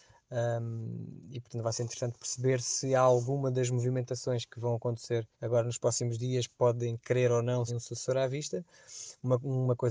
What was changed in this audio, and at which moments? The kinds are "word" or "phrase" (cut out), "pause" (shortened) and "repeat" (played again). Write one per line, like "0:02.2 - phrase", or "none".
0:05.3 - pause
0:07.7 - phrase